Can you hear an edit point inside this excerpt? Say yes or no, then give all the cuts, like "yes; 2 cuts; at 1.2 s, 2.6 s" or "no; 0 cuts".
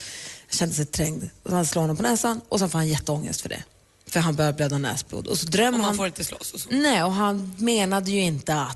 no; 0 cuts